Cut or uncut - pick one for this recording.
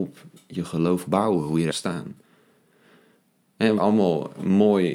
cut